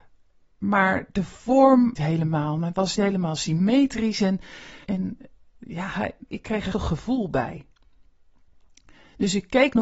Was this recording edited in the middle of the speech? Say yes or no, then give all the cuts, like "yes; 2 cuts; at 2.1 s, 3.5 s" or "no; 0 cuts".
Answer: yes; 5 cuts; at 1.9 s, 3.0 s, 4.8 s, 6.3 s, 6.7 s